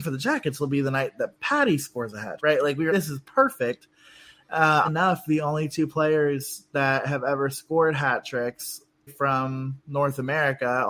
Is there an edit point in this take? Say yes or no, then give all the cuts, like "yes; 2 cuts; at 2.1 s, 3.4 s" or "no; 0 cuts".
yes; 4 cuts; at 2.4 s, 2.9 s, 4.8 s, 9.1 s